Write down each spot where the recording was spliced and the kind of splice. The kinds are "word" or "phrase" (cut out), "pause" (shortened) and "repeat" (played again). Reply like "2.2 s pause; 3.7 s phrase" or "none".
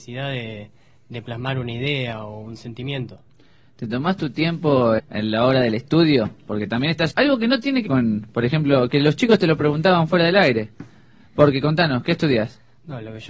5.0 s word; 7.1 s word; 7.9 s word